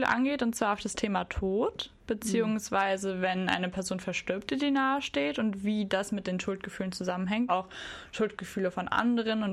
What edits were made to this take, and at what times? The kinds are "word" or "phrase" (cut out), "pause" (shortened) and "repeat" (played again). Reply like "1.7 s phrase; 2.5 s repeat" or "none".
7.5 s word